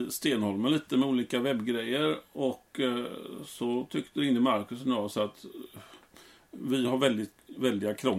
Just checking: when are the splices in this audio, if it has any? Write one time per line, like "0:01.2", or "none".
none